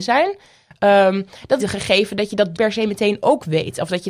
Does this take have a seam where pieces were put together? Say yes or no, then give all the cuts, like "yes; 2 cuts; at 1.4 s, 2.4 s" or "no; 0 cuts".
yes; 2 cuts; at 1.6 s, 2.5 s